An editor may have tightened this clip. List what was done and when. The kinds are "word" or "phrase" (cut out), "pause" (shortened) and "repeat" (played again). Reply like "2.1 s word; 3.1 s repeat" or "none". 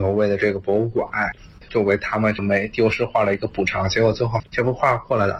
4.5 s pause